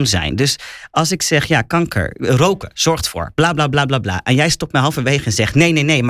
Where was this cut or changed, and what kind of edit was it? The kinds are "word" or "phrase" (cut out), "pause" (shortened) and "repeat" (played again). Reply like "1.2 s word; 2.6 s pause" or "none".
none

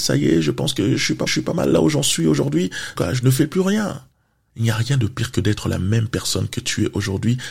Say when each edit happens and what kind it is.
1.3 s repeat; 3.0 s word

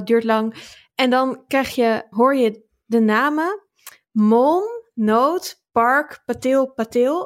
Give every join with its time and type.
2.1 s word

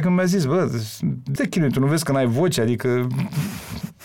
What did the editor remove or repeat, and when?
1.4 s word

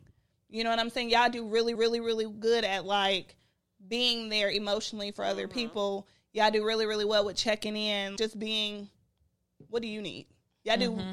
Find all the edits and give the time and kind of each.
1.7 s repeat; 8.2 s word

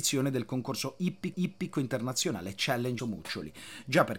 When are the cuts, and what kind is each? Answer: 1.3 s repeat; 3.0 s word

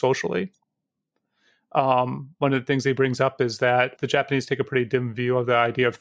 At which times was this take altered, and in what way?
3.9 s word

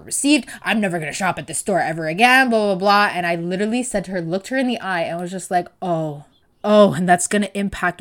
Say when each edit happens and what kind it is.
6.4 s pause

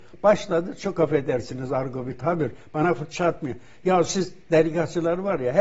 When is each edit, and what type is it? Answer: none

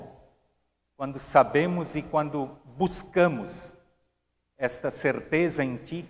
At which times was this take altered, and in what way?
none

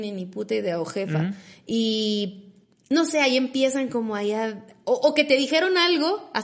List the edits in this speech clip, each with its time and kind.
none

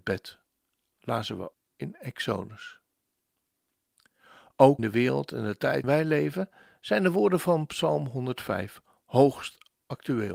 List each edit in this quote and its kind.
1.5 s word; 4.8 s word; 5.8 s word

